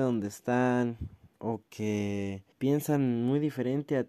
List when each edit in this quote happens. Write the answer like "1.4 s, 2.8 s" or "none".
1.3 s, 2.5 s